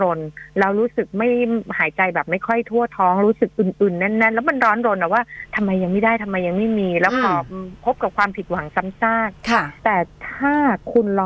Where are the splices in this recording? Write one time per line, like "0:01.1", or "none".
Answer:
0:09.8